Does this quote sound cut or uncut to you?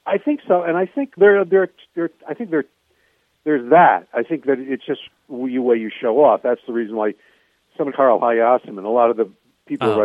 cut